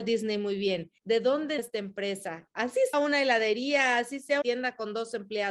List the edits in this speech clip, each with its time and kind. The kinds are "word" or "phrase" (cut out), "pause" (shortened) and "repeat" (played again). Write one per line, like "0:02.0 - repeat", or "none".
0:01.0 - pause
0:01.6 - word
0:02.9 - word
0:04.4 - word

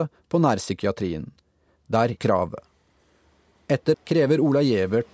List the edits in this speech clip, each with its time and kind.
0:02.2 - word
0:03.9 - word

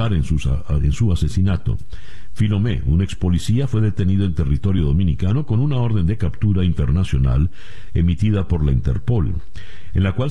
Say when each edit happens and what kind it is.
none

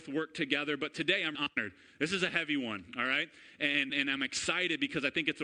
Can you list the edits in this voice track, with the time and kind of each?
0:01.3 - word
0:03.9 - word

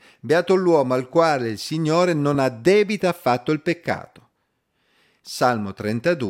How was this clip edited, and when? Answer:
none

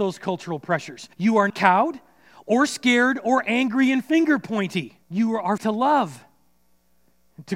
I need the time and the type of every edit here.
0:01.1 - pause
0:01.5 - word
0:05.0 - pause
0:05.6 - word

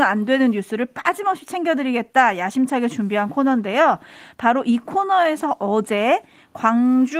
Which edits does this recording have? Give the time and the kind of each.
none

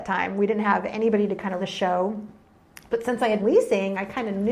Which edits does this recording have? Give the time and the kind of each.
0:01.6 - word
0:03.4 - word

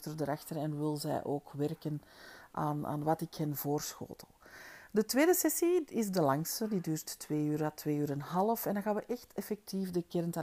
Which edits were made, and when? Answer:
none

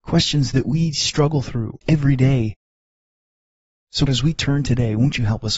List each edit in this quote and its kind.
0:01.8 - word
0:04.1 - word

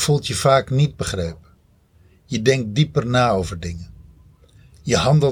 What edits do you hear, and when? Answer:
none

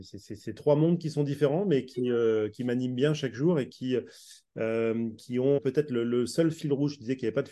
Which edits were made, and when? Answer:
0:05.6 - word

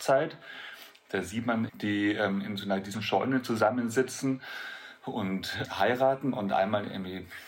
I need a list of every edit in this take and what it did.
0:01.7 - phrase
0:02.9 - word
0:05.6 - word

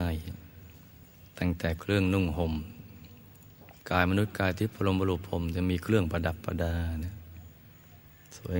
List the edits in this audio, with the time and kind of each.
0:01.3 - pause
0:03.8 - pause

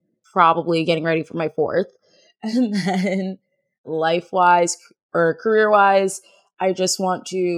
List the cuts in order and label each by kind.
none

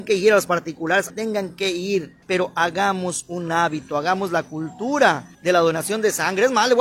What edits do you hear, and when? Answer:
0:01.1 - word
0:02.2 - pause
0:05.3 - pause

